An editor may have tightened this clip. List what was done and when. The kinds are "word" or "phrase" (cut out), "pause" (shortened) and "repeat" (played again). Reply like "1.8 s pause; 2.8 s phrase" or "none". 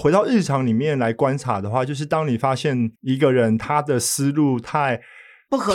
3.0 s pause